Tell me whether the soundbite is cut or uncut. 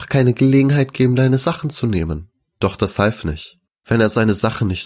uncut